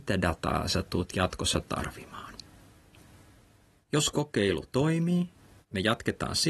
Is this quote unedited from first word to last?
yes; 0 cuts

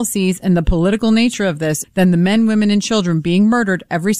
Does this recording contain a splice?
yes; 1 cut; at 1.8 s

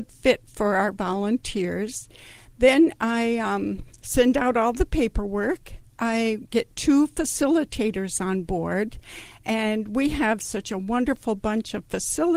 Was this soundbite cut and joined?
no; 0 cuts

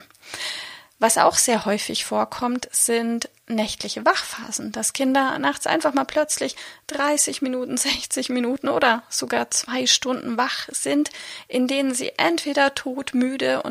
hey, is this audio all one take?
yes; 0 cuts

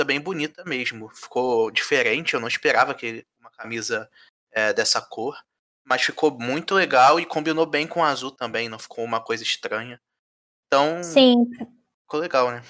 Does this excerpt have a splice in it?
no; 0 cuts

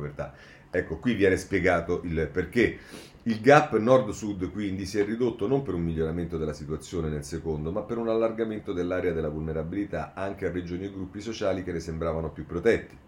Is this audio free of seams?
yes; 0 cuts

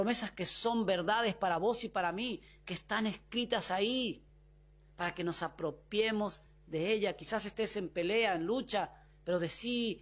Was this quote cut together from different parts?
no; 0 cuts

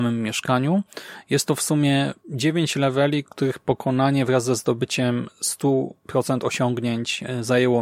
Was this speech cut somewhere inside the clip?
yes; 2 cuts; at 2.2 s, 6.0 s

